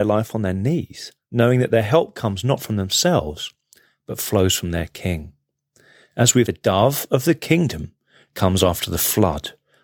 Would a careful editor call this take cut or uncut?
cut